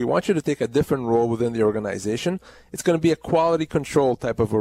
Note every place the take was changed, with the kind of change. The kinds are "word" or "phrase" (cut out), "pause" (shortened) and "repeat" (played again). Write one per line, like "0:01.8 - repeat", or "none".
none